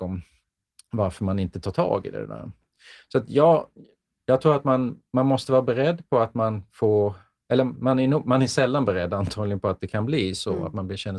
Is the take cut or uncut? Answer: uncut